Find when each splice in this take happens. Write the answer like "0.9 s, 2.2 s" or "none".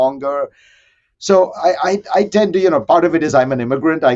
none

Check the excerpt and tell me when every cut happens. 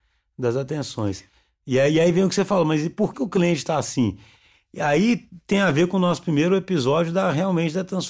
3.1 s

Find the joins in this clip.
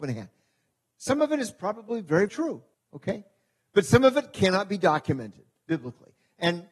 2.3 s, 2.7 s

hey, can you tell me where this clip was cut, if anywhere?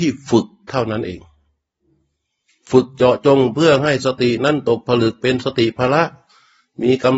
none

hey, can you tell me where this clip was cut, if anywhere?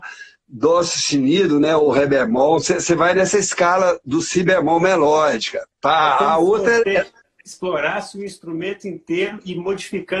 7.2 s

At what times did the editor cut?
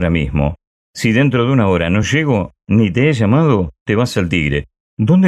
none

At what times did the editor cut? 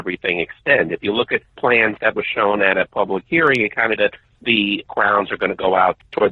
1.5 s, 4.0 s

